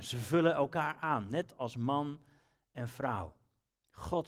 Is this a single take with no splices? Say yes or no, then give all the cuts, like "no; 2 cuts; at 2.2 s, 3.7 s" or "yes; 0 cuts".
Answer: yes; 0 cuts